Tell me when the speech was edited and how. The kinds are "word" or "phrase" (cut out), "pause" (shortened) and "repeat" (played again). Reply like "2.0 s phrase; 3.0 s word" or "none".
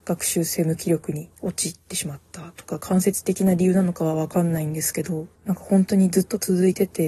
5.4 s pause